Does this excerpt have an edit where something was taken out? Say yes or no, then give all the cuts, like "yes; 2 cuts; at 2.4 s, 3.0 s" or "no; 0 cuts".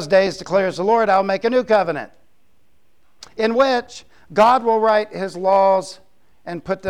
no; 0 cuts